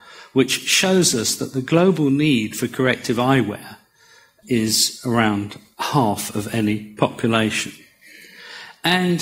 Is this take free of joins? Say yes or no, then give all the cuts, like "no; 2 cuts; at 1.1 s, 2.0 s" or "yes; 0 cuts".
yes; 0 cuts